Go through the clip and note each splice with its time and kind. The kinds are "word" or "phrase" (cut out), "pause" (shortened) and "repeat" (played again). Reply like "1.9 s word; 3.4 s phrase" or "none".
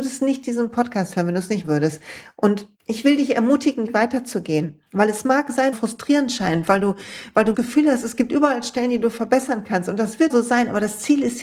1.6 s word; 2.7 s pause; 3.9 s phrase; 4.9 s pause; 5.7 s phrase; 7.5 s word; 10.3 s word